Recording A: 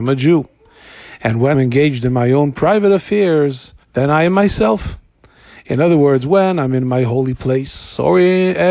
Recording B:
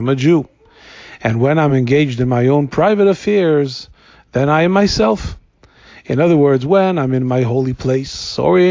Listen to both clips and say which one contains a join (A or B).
A